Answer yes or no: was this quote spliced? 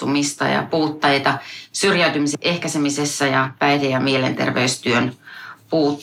no